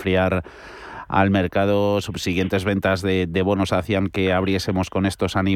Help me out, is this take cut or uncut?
uncut